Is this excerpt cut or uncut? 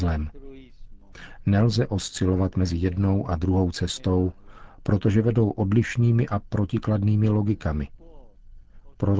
uncut